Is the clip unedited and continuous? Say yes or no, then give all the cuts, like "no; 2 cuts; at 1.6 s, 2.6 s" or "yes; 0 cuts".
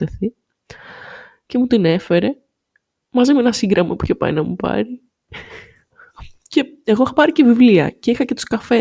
yes; 0 cuts